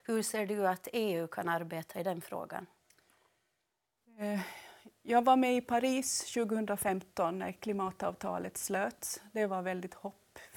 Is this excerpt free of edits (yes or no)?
yes